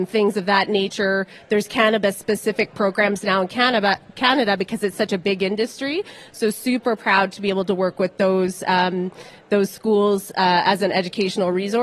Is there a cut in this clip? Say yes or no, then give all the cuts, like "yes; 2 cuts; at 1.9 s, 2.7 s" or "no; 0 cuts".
no; 0 cuts